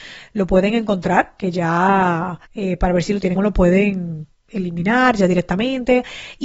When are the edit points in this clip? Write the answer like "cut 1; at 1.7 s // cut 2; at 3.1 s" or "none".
cut 1; at 2.5 s // cut 2; at 3.4 s